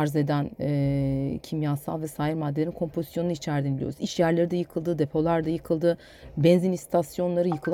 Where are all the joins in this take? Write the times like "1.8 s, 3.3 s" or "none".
none